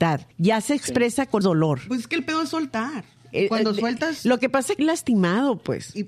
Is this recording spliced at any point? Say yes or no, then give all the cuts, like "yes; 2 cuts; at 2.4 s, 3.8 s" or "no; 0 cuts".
yes; 2 cuts; at 1.4 s, 4.8 s